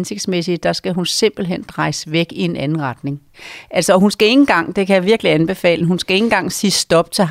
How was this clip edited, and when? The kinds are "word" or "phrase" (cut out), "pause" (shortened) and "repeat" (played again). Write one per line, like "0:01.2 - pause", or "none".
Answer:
0:05.8 - word